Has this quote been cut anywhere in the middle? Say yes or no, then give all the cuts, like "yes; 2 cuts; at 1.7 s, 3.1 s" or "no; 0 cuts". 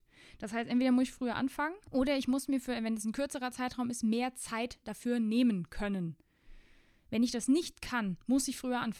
yes; 1 cut; at 1.8 s